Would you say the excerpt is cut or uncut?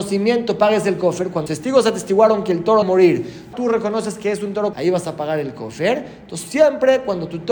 cut